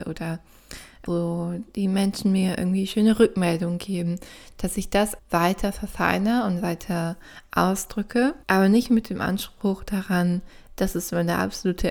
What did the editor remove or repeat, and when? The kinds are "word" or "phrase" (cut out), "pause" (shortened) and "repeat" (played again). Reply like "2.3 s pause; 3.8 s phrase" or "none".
1.1 s word; 5.2 s word; 8.4 s pause